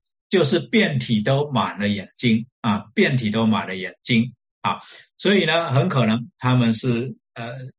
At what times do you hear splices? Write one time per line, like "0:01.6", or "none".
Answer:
0:02.5

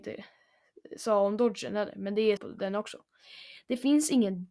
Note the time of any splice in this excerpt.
0:02.4

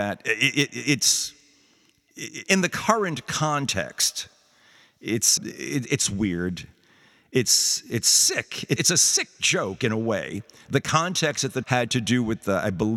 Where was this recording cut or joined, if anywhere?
0:02.4
0:05.4
0:08.8
0:11.6

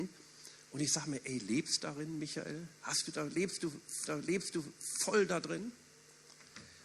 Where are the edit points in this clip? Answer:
0:01.8
0:04.0

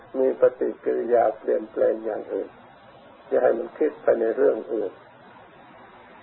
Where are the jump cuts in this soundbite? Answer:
0:02.9

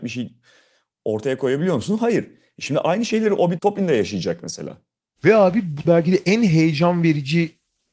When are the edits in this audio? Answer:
0:03.6
0:05.8

